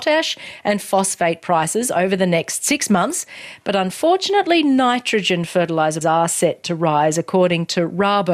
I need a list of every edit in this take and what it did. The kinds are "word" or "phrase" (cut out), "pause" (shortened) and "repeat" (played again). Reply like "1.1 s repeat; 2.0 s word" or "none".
6.0 s word